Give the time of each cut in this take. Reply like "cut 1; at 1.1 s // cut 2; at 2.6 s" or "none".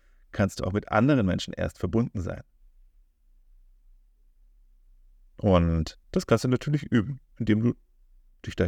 cut 1; at 6.0 s